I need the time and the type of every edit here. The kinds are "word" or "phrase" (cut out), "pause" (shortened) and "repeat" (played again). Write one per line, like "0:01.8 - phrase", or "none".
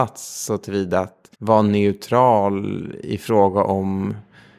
0:01.3 - pause